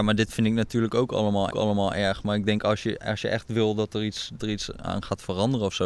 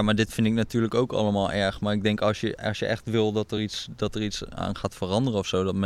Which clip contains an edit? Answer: first; 2 cuts; at 1.5 s, 4.4 s

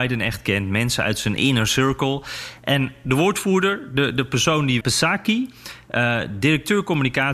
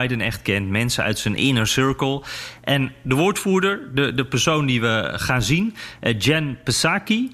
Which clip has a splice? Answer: first; 1 cut; at 4.8 s

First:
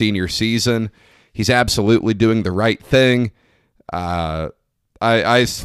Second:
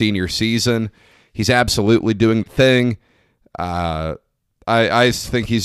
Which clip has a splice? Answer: second; 1 cut; at 2.4 s

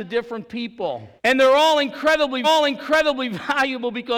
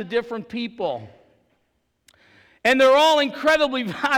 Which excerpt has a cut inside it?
first; 2 cuts; at 1.2 s, 2.4 s

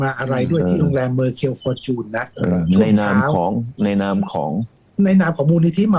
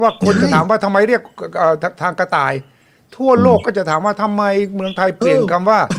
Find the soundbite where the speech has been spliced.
first; 1 cut; at 4.8 s

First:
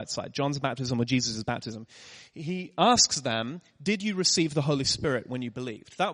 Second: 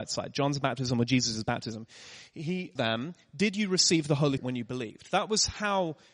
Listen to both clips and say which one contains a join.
second; 2 cuts; at 2.8 s, 4.4 s

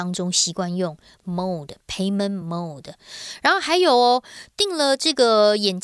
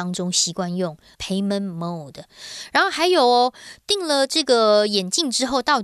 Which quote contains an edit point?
second; 1 cut; at 1.1 s

